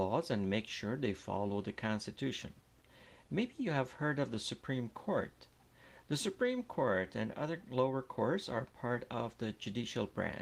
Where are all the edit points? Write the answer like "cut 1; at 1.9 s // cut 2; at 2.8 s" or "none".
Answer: none